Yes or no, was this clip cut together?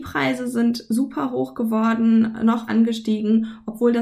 yes